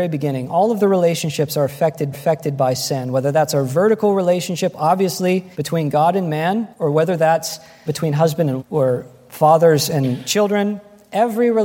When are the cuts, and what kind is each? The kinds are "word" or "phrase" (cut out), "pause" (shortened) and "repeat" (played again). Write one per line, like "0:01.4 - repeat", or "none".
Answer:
0:02.1 - repeat
0:05.5 - pause
0:06.7 - pause
0:07.9 - word
0:08.6 - word